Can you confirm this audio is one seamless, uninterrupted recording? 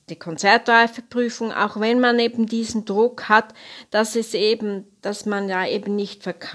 yes; 0 cuts

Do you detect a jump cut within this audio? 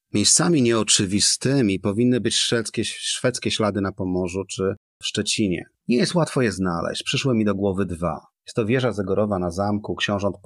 no; 0 cuts

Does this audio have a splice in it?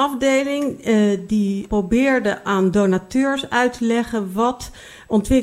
no; 0 cuts

